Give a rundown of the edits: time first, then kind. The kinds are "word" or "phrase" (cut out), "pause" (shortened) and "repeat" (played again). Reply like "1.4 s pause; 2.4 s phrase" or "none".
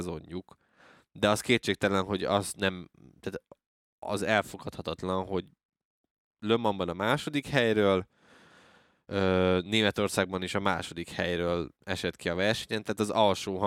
none